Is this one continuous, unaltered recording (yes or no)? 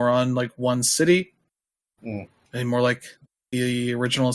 yes